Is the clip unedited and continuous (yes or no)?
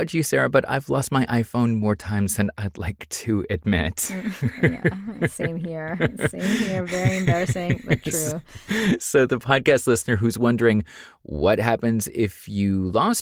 yes